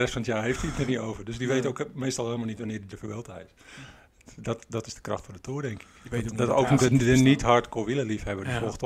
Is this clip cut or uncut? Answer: cut